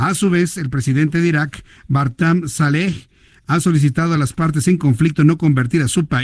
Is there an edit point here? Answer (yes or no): no